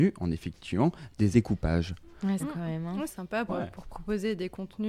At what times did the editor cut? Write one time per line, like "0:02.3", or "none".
0:01.3
0:02.4
0:03.1
0:03.5